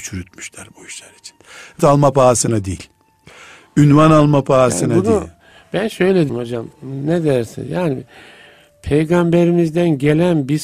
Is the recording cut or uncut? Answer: cut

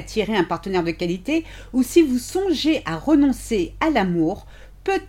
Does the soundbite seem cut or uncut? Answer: uncut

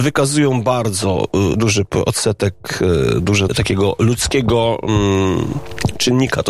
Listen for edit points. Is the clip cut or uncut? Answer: cut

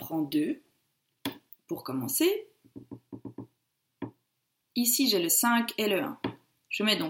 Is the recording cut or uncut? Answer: uncut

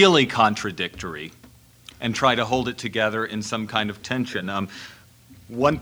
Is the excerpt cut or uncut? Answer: cut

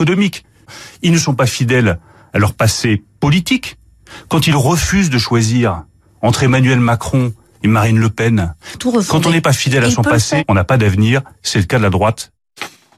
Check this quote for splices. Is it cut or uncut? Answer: uncut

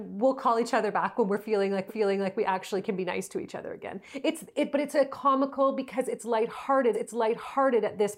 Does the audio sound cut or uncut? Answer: cut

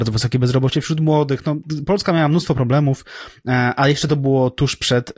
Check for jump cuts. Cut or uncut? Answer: uncut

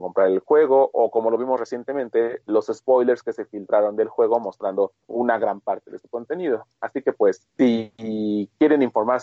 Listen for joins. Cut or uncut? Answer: cut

